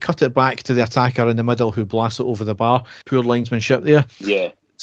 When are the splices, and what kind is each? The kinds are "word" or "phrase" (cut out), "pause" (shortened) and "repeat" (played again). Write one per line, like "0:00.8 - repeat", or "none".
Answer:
0:03.0 - pause